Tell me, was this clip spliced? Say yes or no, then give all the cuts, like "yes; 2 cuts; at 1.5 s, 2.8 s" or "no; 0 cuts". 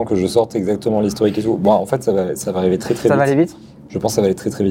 no; 0 cuts